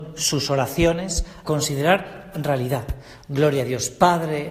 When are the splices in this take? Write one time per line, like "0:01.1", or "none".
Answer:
0:01.4
0:02.3